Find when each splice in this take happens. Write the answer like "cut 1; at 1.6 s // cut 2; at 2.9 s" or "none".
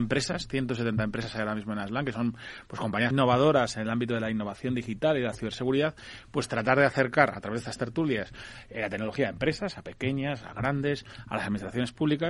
cut 1; at 3.1 s